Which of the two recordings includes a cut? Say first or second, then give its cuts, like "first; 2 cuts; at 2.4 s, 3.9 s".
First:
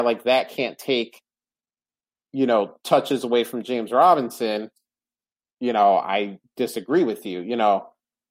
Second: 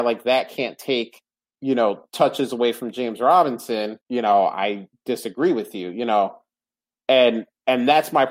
second; 2 cuts; at 1.4 s, 4.0 s